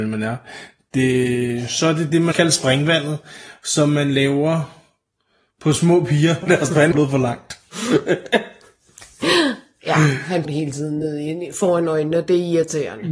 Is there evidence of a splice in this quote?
yes; 4 cuts; at 2.3 s, 6.4 s, 6.9 s, 10.4 s

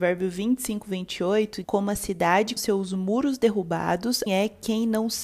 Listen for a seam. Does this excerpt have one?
yes; 3 cuts; at 1.6 s, 2.6 s, 4.3 s

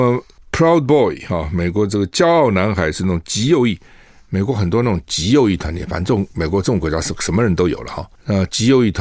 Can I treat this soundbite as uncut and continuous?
yes; 0 cuts

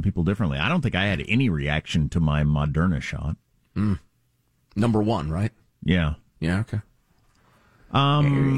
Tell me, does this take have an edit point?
no; 0 cuts

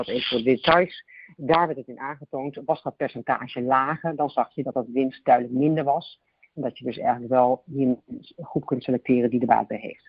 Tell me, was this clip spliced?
no; 0 cuts

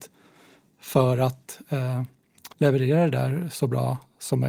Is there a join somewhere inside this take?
yes; 1 cut; at 2.5 s

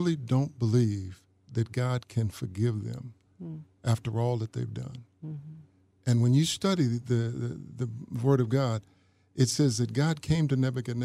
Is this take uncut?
yes; 0 cuts

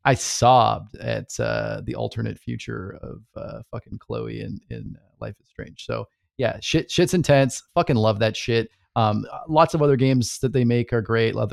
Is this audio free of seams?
yes; 0 cuts

